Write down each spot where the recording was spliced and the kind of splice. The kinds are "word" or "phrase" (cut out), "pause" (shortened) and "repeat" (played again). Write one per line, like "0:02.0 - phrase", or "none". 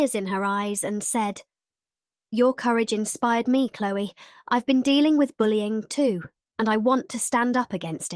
none